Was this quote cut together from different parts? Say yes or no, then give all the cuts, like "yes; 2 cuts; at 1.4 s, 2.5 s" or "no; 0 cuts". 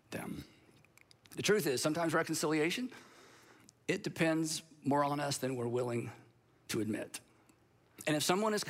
no; 0 cuts